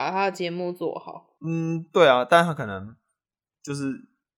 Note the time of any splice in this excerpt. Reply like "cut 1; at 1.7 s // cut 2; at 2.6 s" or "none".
cut 1; at 1.4 s